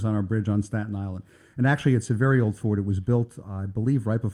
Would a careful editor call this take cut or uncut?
uncut